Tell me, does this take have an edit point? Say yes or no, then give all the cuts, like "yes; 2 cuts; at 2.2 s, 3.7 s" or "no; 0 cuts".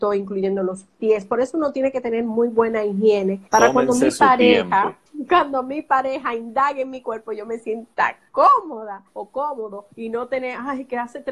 yes; 4 cuts; at 3.5 s, 5.1 s, 9.1 s, 9.9 s